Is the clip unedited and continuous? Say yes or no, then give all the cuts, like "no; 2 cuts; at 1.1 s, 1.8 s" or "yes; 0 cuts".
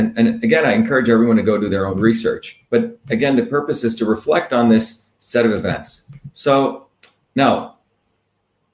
no; 1 cut; at 2.7 s